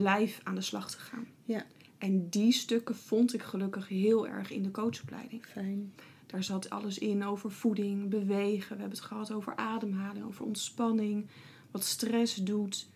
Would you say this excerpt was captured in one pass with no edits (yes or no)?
yes